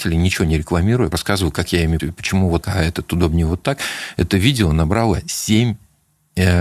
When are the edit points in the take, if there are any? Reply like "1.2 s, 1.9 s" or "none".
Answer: 1.1 s, 2.0 s, 2.6 s